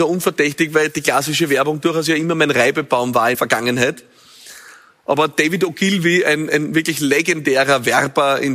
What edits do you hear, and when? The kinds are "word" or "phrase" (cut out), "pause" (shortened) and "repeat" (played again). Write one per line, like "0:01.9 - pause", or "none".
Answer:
0:03.3 - word